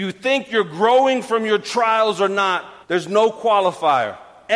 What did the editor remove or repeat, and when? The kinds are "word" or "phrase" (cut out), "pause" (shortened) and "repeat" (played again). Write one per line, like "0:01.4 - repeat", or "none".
0:02.8 - pause

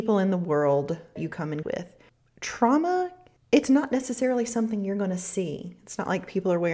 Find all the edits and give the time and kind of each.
0:01.2 - word
0:01.6 - word

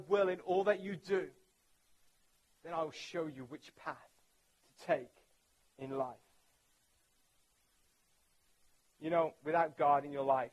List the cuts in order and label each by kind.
none

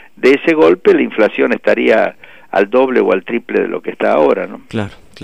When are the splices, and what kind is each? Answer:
none

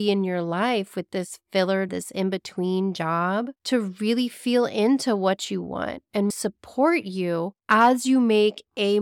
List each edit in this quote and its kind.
0:01.9 - word
0:03.6 - pause
0:06.3 - word
0:07.6 - pause

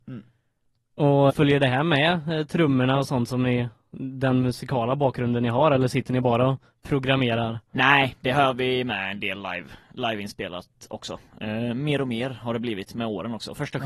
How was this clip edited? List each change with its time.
0:01.3 - word

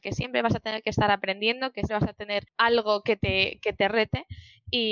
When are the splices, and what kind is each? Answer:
0:01.9 - word
0:02.5 - pause

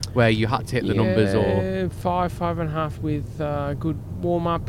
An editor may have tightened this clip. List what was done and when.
0:02.9 - word

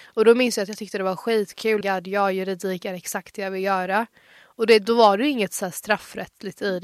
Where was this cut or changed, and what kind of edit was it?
0:01.8 - phrase

